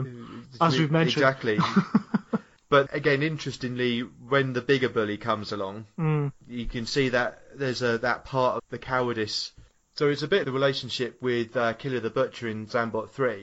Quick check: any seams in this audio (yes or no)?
yes